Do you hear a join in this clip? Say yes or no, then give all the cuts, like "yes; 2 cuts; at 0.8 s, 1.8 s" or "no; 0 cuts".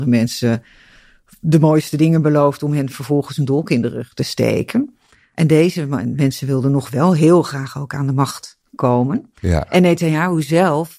no; 0 cuts